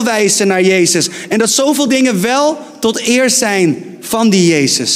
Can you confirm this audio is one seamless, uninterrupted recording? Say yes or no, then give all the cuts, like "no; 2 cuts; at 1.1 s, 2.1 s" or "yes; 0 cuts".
yes; 0 cuts